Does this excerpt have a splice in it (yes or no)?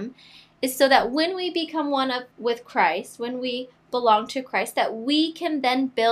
yes